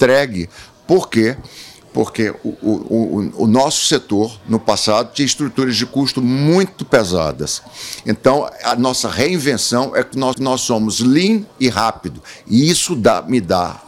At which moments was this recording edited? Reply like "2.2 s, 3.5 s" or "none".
10.3 s, 11.5 s